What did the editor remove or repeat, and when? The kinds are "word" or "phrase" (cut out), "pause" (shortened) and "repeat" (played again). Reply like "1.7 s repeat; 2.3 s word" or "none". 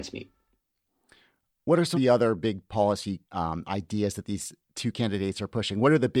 1.9 s word; 3.2 s pause; 4.6 s pause

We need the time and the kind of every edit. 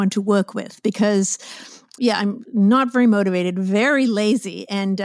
2.0 s word

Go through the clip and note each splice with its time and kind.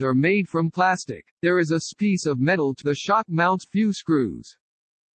1.3 s pause; 1.9 s word; 2.8 s word; 3.6 s phrase

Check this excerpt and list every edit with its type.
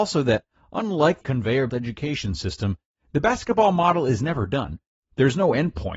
1.2 s word; 1.7 s word

